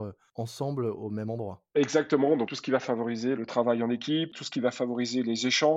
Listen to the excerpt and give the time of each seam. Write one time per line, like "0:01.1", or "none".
0:02.5
0:03.4

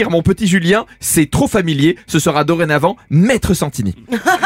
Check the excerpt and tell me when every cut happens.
none

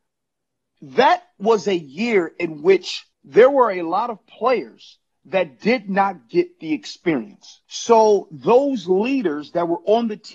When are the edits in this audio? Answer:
0:03.1
0:07.6

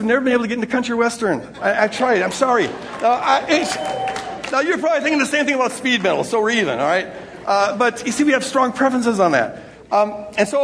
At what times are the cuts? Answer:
none

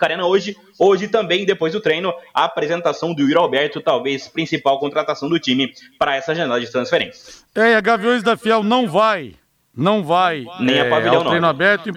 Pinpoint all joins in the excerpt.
none

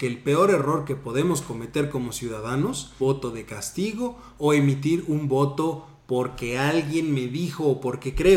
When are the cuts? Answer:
0:03.0

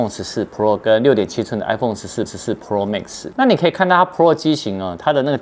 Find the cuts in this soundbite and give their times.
0:02.3

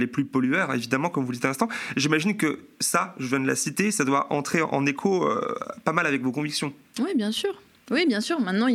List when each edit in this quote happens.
none

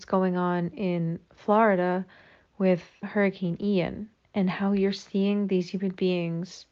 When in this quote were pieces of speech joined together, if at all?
0:03.0

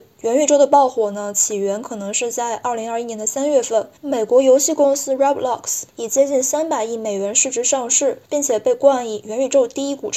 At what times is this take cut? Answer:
0:04.0
0:05.9
0:08.2

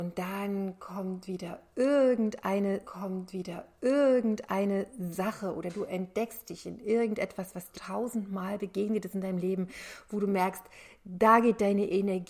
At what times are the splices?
0:02.8
0:07.7

